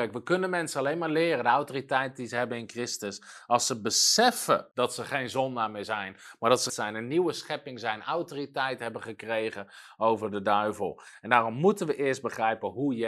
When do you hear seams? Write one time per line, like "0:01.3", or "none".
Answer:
0:04.7
0:06.7